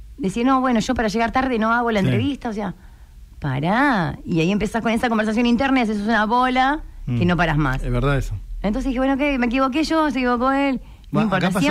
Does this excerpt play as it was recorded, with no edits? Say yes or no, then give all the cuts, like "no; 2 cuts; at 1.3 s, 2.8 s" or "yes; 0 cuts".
yes; 0 cuts